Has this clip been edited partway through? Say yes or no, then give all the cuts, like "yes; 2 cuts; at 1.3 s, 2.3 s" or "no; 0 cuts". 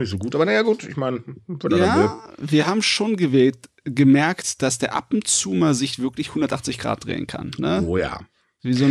no; 0 cuts